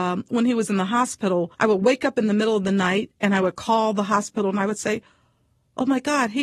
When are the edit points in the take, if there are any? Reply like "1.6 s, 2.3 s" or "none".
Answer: 1.5 s